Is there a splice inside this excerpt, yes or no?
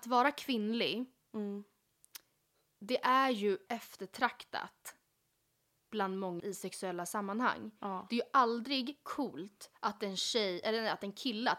yes